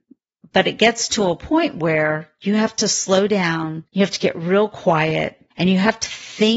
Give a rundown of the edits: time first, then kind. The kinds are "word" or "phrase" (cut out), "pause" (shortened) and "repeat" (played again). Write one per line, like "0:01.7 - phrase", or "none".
0:03.9 - pause
0:05.5 - pause

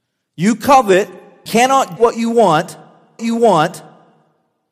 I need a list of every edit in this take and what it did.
0:01.5 - word
0:02.0 - word
0:03.2 - repeat

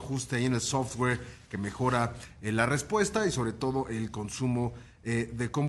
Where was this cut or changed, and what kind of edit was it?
none

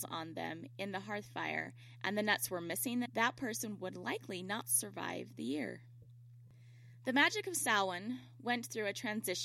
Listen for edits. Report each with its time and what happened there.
0:03.1 - phrase

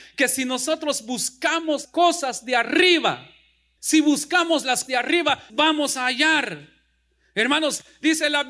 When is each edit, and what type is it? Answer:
0:01.8 - word
0:03.8 - word
0:04.9 - word
0:05.5 - word

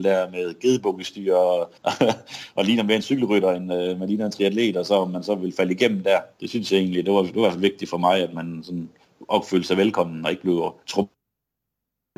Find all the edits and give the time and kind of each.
0:01.8 - pause
0:06.3 - pause
0:10.8 - pause

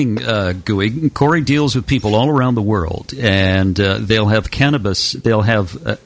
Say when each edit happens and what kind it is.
none

